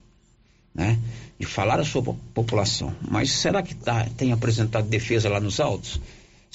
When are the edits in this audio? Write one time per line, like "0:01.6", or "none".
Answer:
none